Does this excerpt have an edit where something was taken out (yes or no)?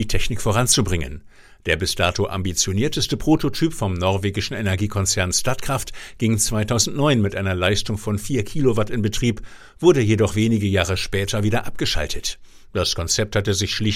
no